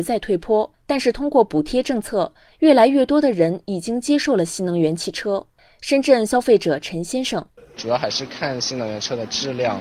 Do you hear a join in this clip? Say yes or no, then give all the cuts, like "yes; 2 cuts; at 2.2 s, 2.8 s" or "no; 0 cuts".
yes; 1 cut; at 7.5 s